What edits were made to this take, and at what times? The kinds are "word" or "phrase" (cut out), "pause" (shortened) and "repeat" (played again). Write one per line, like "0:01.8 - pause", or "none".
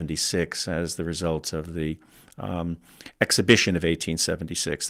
none